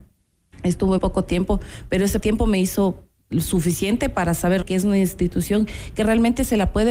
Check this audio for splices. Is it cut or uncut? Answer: cut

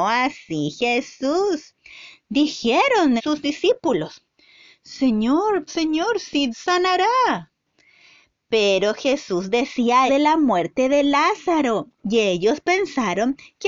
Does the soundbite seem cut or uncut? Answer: cut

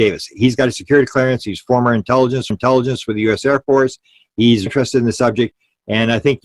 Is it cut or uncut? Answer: cut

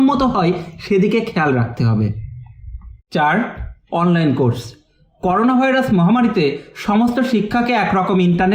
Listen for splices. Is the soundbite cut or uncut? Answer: uncut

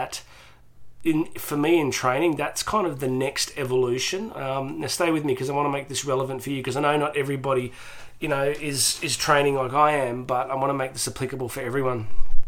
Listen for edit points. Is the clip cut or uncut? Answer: uncut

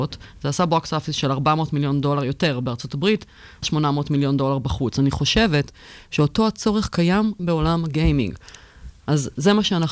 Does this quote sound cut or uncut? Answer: cut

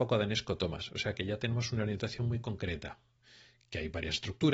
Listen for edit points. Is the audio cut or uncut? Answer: uncut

